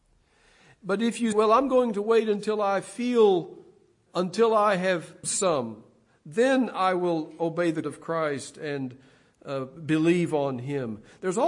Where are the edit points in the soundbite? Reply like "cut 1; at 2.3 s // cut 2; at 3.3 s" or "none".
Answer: cut 1; at 1.3 s // cut 2; at 4.1 s // cut 3; at 5.2 s // cut 4; at 7.8 s